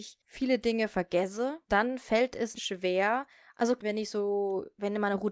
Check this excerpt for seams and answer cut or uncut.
cut